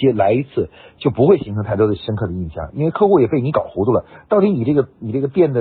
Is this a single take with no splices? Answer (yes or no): yes